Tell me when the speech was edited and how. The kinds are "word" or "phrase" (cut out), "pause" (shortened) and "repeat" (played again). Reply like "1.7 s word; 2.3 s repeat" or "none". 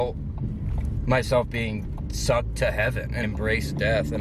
3.2 s word